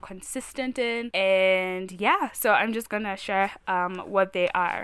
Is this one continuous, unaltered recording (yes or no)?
yes